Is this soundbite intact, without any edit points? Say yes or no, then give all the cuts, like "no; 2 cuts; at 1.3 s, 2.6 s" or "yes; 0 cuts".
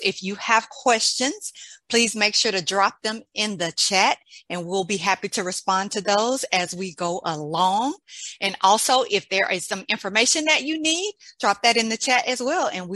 yes; 0 cuts